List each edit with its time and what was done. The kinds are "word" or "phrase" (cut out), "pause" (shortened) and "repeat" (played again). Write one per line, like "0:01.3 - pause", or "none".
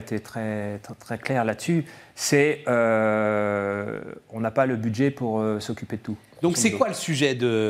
none